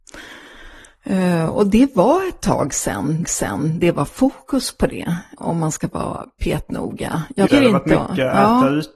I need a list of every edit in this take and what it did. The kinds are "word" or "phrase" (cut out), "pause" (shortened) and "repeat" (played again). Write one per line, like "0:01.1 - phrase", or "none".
0:03.2 - repeat
0:05.4 - word
0:07.5 - word